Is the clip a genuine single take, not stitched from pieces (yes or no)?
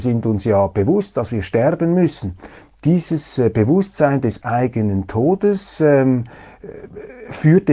yes